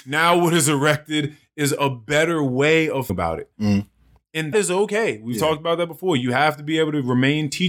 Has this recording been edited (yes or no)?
yes